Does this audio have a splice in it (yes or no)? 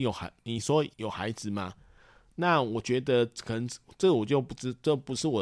yes